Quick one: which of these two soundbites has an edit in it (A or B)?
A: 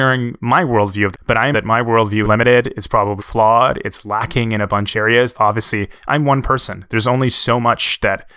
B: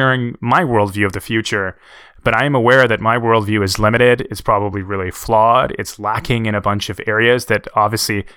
A